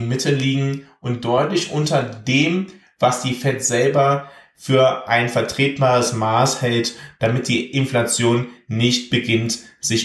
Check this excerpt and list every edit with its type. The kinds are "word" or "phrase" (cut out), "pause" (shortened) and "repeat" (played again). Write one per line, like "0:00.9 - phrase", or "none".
none

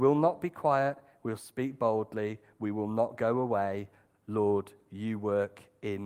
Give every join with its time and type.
none

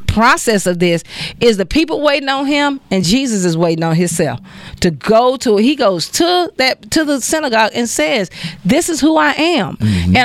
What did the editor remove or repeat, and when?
none

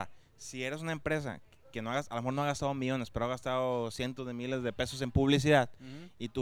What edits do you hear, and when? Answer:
none

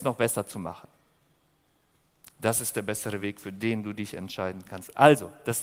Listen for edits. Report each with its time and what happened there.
none

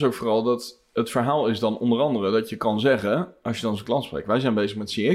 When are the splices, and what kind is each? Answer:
0:04.2 - word

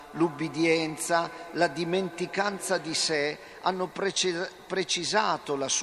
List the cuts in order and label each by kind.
none

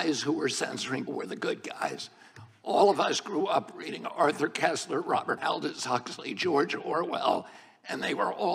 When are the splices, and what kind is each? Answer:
0:01.1 - word
0:05.4 - word

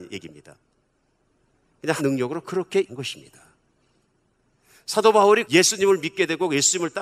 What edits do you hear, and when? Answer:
0:02.0 - word
0:02.9 - word
0:05.4 - word

